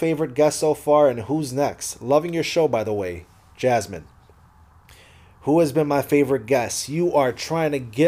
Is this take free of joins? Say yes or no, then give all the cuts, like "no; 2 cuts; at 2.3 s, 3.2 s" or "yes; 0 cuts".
yes; 0 cuts